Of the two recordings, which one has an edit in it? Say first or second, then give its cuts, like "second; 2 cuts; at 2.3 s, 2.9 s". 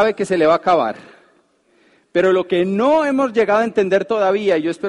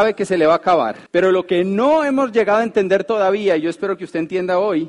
second; 1 cut; at 1.1 s